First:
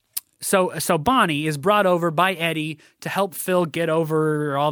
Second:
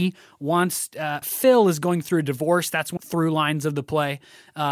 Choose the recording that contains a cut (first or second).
second